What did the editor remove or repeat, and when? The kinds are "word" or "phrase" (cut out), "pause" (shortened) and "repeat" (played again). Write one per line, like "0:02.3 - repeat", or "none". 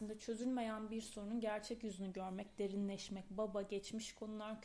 none

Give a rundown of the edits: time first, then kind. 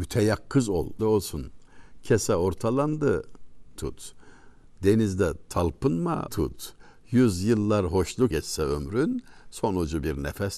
0:01.0 - phrase
0:03.7 - word
0:06.3 - word
0:08.3 - word

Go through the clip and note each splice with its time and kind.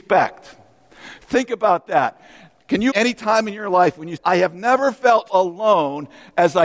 0:02.9 - word
0:04.2 - word
0:05.3 - word

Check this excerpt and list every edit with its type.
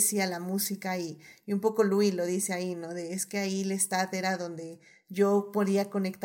none

